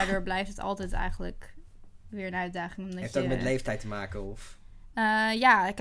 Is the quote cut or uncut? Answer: uncut